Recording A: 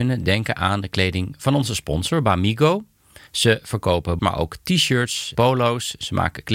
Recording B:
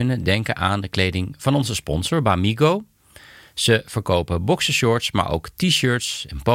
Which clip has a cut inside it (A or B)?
A